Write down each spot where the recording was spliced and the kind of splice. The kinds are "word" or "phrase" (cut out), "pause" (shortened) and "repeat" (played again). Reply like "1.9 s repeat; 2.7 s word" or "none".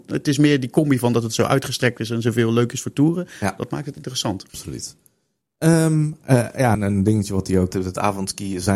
4.5 s pause; 6.7 s word; 7.7 s word